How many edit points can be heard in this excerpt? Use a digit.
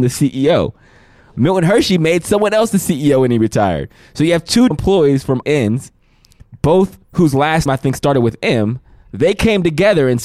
4